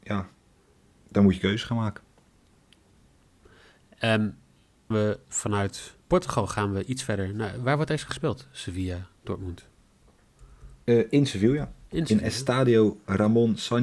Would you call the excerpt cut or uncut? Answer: cut